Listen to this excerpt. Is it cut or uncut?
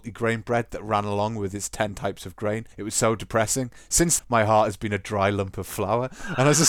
cut